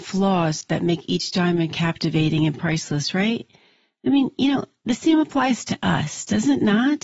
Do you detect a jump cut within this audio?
no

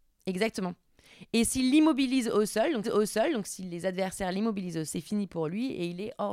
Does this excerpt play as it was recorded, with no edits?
no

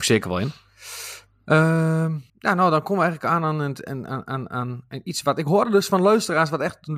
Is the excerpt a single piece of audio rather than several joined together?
no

